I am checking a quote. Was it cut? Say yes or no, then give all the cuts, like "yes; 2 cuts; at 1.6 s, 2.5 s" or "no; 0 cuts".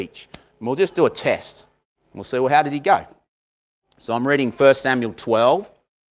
no; 0 cuts